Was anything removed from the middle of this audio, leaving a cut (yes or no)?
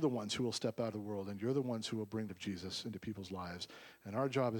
yes